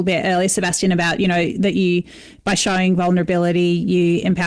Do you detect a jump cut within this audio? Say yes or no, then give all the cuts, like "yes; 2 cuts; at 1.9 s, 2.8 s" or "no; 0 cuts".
no; 0 cuts